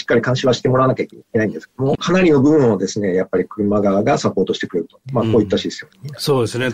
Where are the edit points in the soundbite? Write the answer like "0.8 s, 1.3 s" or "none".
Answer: 1.9 s